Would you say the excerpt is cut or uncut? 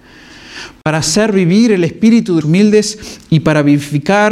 cut